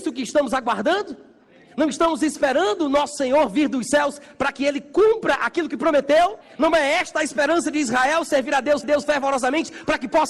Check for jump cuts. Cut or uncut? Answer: cut